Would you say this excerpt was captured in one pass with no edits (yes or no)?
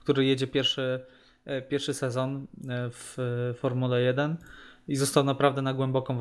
yes